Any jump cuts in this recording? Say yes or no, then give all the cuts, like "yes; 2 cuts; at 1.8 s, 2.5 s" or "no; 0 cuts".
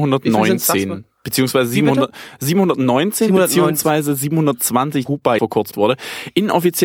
yes; 3 cuts; at 5.1 s, 5.4 s, 5.7 s